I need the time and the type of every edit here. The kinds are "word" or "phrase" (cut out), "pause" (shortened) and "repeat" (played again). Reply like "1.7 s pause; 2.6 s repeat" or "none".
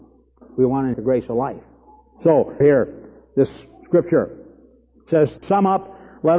0.9 s word; 2.6 s word; 5.4 s word

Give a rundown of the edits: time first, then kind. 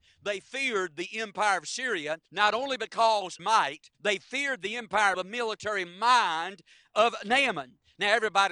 2.2 s pause; 3.4 s phrase; 3.9 s pause; 5.1 s phrase

